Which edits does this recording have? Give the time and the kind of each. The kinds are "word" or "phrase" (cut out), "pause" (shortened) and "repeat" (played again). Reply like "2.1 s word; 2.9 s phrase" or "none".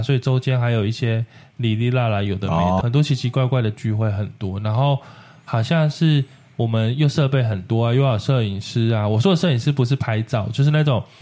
2.8 s word